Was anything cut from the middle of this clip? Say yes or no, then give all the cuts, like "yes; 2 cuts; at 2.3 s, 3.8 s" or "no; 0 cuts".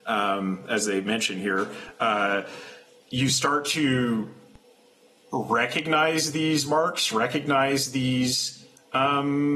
no; 0 cuts